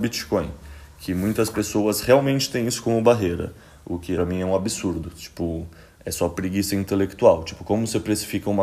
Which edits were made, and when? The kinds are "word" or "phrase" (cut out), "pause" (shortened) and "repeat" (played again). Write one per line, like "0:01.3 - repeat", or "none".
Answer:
0:04.2 - phrase